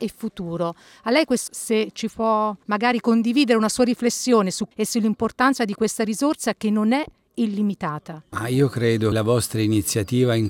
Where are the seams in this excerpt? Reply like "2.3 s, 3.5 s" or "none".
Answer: 1.5 s, 4.7 s, 9.1 s

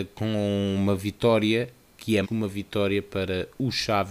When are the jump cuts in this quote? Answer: 2.2 s

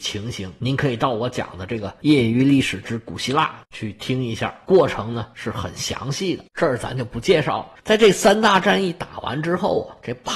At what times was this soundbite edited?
6.5 s, 7.8 s

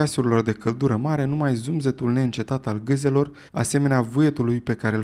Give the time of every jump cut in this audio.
3.5 s

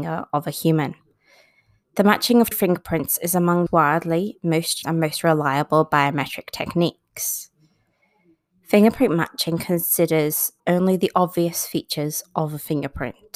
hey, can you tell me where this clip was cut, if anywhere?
2.5 s, 3.7 s, 4.8 s, 10.6 s

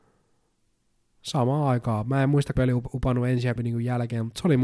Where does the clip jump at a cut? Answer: 2.6 s, 3.6 s

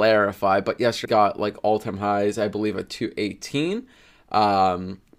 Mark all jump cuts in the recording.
1.0 s

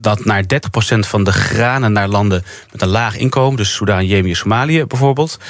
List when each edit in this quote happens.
none

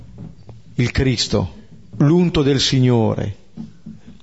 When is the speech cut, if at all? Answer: none

